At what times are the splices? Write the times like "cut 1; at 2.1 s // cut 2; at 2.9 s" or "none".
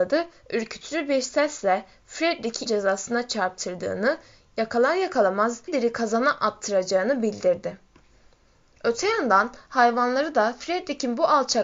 cut 1; at 2.7 s // cut 2; at 5.7 s